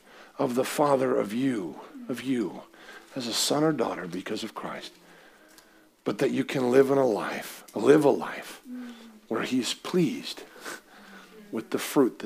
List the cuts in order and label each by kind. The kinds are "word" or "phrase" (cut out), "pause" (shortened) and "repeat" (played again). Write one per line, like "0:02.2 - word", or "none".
none